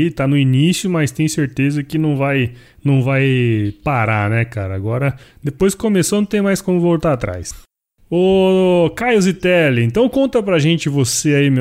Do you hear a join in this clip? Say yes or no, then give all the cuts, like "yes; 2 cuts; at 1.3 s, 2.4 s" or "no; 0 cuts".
no; 0 cuts